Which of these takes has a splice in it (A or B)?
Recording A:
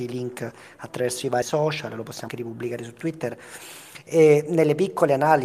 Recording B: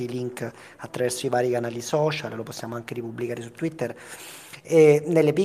A